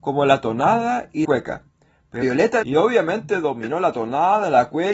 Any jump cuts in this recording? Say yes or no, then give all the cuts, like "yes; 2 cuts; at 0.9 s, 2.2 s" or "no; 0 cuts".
yes; 3 cuts; at 1.3 s, 2.2 s, 2.6 s